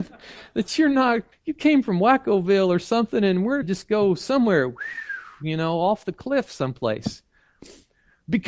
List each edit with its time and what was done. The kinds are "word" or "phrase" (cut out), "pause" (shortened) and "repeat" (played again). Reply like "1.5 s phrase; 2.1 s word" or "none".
1.3 s pause; 3.6 s phrase